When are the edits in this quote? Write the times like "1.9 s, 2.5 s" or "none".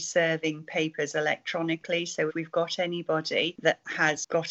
2.3 s